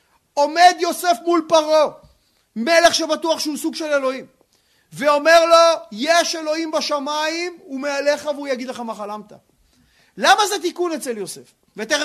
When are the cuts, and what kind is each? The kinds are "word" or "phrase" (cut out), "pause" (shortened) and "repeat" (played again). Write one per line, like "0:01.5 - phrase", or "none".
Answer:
none